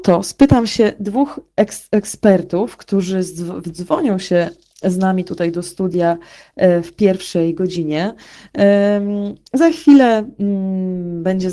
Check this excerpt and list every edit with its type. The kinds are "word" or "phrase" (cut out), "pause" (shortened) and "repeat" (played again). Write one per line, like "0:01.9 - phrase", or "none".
none